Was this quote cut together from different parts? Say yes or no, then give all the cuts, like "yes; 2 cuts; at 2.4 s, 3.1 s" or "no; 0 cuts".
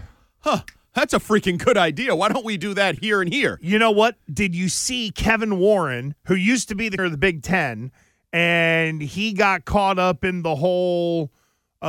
yes; 2 cuts; at 3.0 s, 7.0 s